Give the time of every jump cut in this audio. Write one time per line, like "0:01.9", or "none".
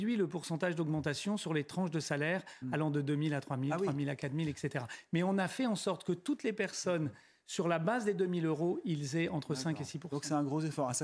none